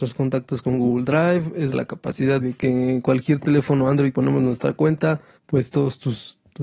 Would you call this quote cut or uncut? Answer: cut